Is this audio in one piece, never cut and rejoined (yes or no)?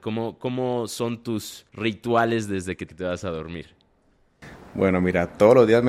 no